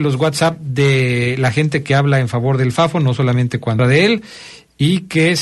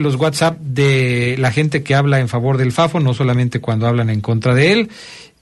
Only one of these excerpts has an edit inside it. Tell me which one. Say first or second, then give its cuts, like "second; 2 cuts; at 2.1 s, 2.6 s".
first; 1 cut; at 3.8 s